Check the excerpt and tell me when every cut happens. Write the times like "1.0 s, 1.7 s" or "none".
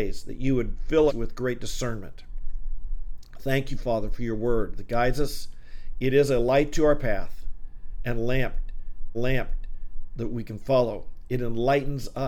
1.1 s, 9.1 s